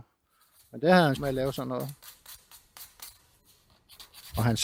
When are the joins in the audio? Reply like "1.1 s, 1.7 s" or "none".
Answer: 1.2 s